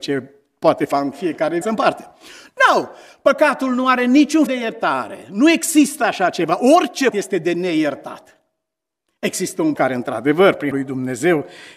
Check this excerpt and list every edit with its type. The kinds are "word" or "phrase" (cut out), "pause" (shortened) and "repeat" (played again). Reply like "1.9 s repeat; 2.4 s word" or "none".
0.9 s word; 1.6 s word; 4.5 s word; 7.1 s word; 9.8 s word; 10.7 s word